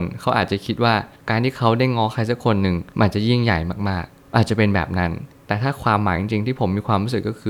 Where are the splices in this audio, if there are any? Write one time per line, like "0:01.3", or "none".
0:02.9